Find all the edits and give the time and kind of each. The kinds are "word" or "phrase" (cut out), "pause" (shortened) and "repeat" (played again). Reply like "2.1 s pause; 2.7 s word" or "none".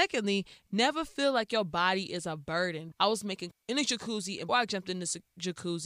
2.9 s word; 3.5 s word; 4.5 s word